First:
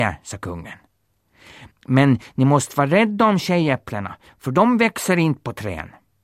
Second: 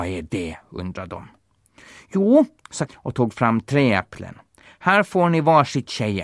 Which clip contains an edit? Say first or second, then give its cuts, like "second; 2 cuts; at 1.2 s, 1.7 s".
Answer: second; 1 cut; at 2.9 s